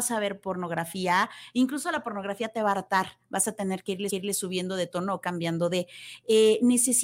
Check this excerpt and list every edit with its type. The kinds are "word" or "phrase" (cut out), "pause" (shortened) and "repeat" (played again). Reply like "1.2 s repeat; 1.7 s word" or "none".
4.1 s repeat